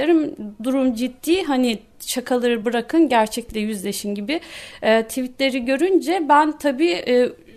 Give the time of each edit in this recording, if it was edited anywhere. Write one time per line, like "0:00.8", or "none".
none